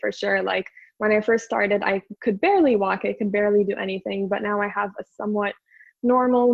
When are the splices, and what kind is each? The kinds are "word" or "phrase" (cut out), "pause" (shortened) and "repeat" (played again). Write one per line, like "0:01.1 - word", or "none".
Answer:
none